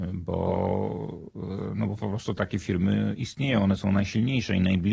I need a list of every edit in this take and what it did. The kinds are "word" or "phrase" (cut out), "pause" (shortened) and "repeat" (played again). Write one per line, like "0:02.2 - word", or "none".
none